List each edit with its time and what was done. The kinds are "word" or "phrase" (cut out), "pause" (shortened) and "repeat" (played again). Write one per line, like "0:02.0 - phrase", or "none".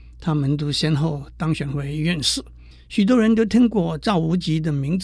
0:02.7 - pause